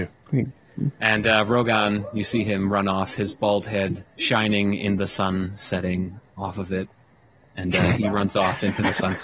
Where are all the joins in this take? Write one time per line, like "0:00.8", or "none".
none